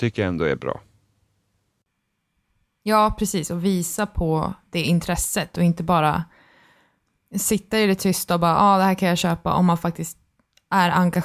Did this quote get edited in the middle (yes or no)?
no